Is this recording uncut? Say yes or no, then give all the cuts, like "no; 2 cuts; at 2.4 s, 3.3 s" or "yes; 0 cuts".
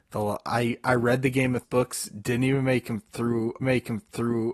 no; 2 cuts; at 1.6 s, 3.6 s